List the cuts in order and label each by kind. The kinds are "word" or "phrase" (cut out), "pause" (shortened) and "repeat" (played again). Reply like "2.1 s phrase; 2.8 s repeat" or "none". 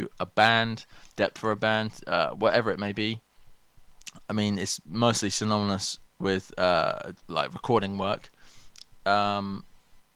1.1 s pause; 6.1 s pause